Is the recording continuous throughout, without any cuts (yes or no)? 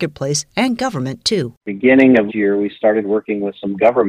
no